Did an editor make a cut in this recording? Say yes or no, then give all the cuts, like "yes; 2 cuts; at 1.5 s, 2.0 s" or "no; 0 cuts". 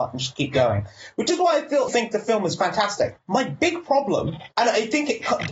yes; 2 cuts; at 1.9 s, 4.5 s